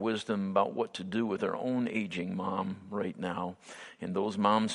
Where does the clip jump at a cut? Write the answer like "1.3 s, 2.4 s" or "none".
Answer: none